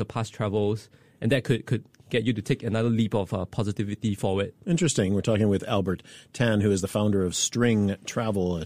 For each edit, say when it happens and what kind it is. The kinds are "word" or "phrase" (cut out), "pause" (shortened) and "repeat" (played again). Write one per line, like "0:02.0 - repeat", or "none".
none